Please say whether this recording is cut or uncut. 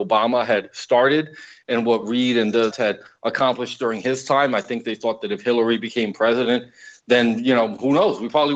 cut